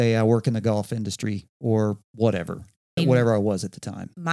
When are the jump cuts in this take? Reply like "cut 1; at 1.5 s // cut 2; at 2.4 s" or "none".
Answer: cut 1; at 3.0 s